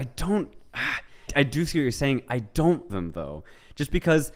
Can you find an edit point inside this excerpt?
yes; 2 cuts; at 1.3 s, 2.9 s

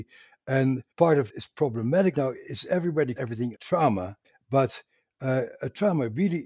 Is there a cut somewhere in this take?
yes; 6 cuts; at 0.9 s, 1.3 s, 2.1 s, 3.2 s, 3.5 s, 4.2 s

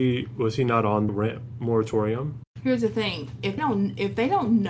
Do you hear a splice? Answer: yes; 2 cuts; at 1.1 s, 3.6 s

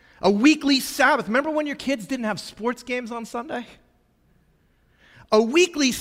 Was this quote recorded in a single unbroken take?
yes; 0 cuts

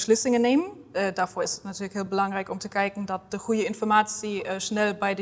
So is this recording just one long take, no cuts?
yes; 0 cuts

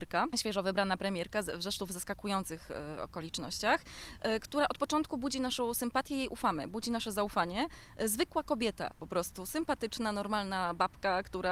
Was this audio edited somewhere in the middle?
no; 0 cuts

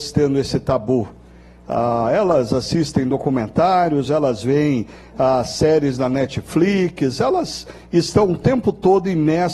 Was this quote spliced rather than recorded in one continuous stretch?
no; 0 cuts

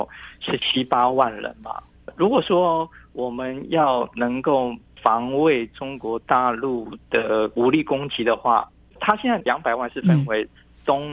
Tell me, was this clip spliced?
no; 0 cuts

